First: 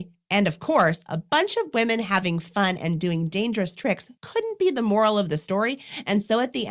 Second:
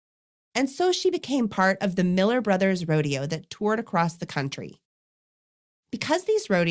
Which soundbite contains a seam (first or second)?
first